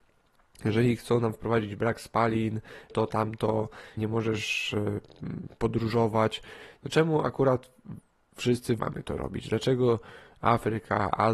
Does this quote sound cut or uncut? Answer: cut